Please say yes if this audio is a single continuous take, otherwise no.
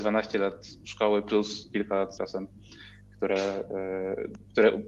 no